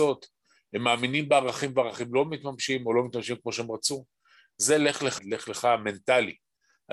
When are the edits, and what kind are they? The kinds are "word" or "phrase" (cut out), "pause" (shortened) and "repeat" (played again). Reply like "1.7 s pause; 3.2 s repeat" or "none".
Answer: 5.2 s word